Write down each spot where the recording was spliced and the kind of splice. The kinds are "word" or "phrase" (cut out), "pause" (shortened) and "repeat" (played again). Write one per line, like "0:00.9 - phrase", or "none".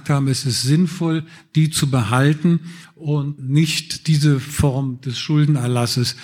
0:03.4 - word

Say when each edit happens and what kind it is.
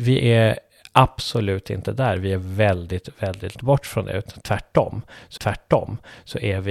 0:03.5 - word
0:05.4 - repeat

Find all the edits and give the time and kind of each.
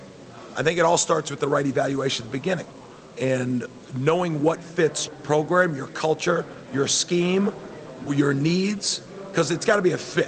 0:05.1 - word

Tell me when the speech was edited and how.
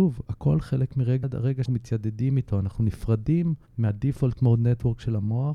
0:01.2 - phrase
0:01.7 - word
0:03.7 - pause

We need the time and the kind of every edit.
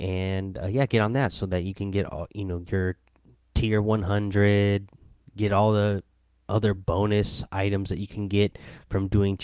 none

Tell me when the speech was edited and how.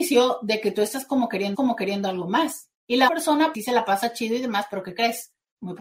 0:01.5 - repeat
0:02.8 - pause
0:03.1 - word
0:03.5 - word

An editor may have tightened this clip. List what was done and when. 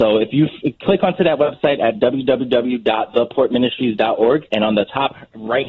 none

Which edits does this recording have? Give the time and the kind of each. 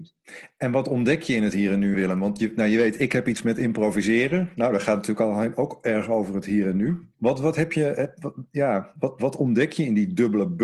0:01.9 - word
0:07.1 - pause

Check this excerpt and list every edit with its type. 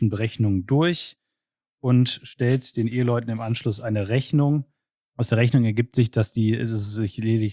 none

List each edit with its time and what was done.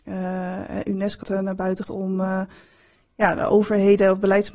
0:01.2 - phrase
0:01.8 - word

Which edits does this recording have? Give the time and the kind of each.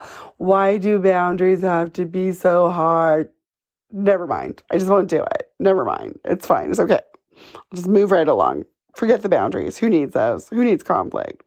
none

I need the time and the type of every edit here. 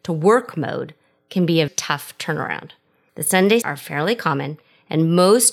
0:01.7 - word
0:03.6 - word

